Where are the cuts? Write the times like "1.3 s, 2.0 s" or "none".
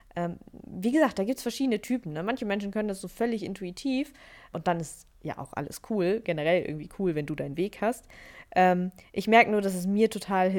4.5 s